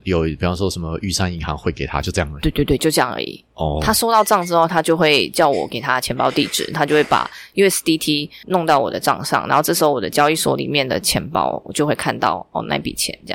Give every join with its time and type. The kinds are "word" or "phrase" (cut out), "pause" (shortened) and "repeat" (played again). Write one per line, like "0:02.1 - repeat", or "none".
none